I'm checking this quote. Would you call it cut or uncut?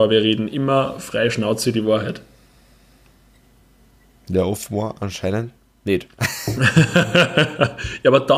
uncut